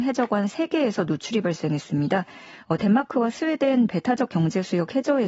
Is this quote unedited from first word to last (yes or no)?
yes